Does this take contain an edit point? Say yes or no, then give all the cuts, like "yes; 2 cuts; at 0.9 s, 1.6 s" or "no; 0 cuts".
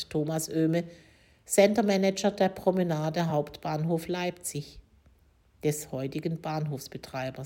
no; 0 cuts